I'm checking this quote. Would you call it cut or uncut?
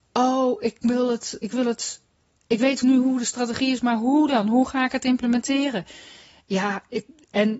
uncut